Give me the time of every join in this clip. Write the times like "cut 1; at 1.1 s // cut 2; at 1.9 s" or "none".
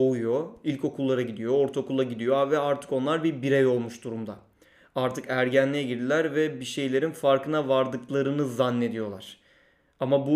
none